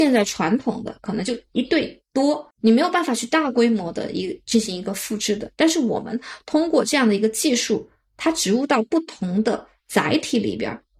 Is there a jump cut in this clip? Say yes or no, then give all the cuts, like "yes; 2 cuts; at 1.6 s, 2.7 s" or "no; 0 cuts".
yes; 1 cut; at 2.5 s